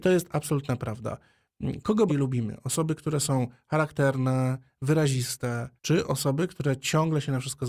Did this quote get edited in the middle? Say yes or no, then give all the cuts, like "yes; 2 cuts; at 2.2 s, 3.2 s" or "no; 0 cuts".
yes; 2 cuts; at 2.1 s, 5.8 s